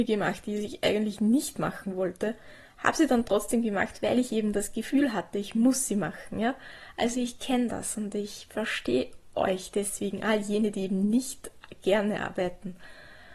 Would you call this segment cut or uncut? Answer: uncut